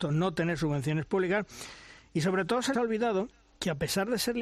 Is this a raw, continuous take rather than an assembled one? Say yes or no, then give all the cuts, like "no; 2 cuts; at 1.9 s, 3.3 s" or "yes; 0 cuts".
no; 1 cut; at 2.7 s